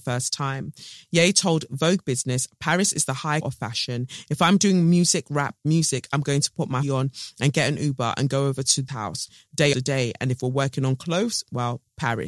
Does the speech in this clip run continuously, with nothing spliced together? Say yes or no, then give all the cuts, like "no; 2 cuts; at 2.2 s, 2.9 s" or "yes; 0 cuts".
no; 4 cuts; at 3.4 s, 6.8 s, 8.9 s, 9.7 s